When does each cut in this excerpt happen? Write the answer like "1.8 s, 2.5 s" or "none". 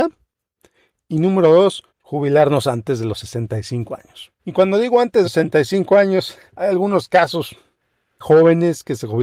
1.9 s, 4.4 s, 5.2 s, 6.5 s, 8.2 s